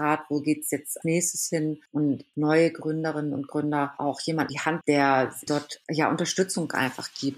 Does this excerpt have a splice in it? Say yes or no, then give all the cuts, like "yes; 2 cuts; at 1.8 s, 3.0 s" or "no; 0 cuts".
yes; 6 cuts; at 1.0 s, 2.3 s, 4.0 s, 4.5 s, 4.8 s, 5.5 s